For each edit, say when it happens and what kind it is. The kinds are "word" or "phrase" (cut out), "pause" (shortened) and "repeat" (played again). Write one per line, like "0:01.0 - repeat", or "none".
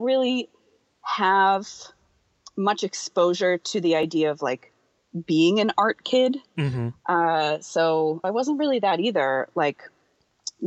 0:08.2 - word